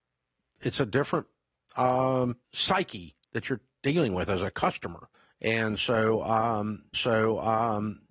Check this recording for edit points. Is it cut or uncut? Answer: cut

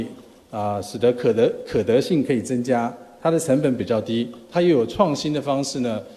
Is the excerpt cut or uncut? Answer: uncut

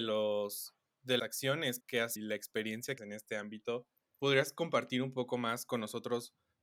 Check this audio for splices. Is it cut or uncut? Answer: cut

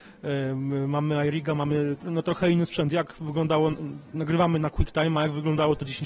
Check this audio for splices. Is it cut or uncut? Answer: uncut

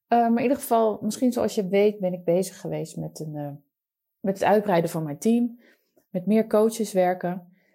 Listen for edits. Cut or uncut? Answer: uncut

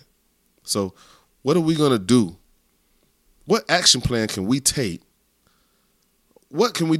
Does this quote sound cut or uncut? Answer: uncut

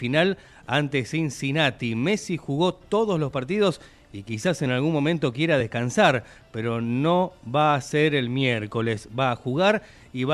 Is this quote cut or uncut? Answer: uncut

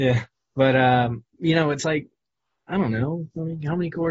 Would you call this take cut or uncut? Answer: uncut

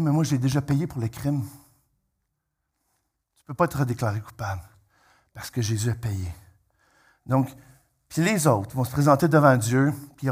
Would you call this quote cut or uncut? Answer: uncut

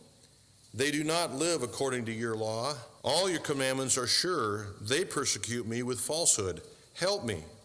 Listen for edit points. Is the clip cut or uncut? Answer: cut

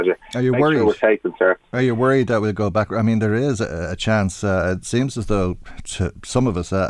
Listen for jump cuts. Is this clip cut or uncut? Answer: uncut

